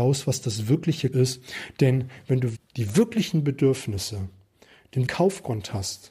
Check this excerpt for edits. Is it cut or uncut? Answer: cut